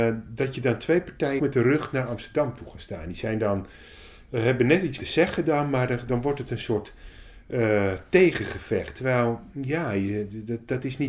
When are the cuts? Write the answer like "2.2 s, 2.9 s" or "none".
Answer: 1.4 s, 5.0 s, 6.1 s

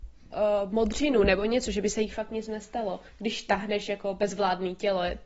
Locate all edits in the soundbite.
3.1 s

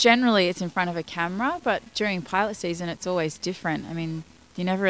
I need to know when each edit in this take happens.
none

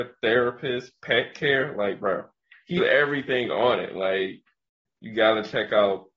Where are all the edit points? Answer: 2.8 s

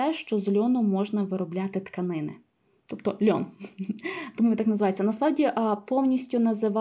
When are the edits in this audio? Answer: none

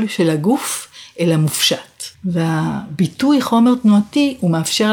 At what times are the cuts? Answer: 2.1 s

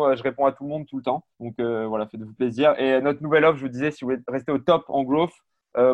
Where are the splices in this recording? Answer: 1.3 s

